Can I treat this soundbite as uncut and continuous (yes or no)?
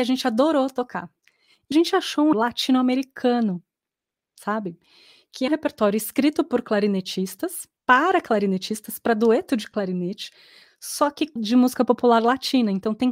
no